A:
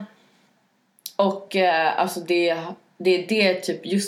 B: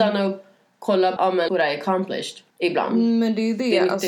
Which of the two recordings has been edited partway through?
B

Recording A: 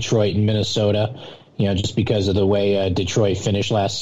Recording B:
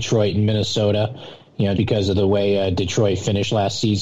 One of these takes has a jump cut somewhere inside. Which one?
B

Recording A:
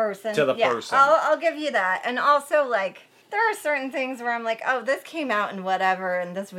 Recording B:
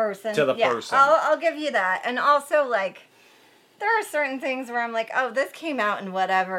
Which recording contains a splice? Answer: A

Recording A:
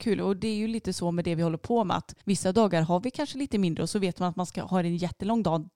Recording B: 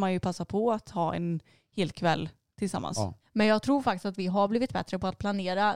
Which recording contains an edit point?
A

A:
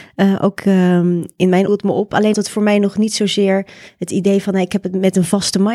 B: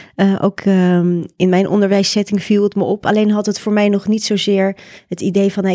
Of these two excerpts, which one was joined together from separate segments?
A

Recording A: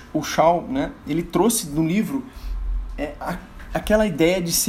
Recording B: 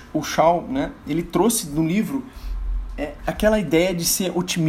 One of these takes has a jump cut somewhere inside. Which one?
B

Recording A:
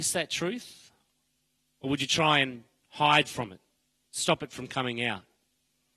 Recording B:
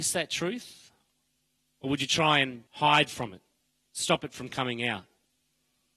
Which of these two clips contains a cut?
B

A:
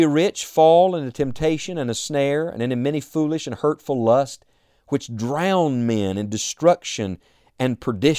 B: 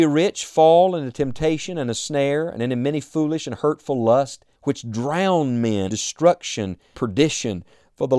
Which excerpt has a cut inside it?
B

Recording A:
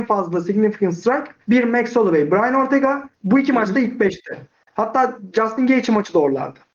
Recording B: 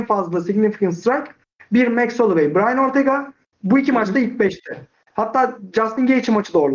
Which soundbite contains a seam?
A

